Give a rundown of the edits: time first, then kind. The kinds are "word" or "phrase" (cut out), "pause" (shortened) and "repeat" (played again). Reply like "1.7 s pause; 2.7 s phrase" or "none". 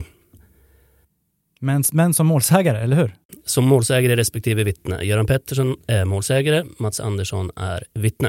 none